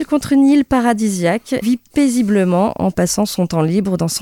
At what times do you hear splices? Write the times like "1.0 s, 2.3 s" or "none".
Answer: 1.6 s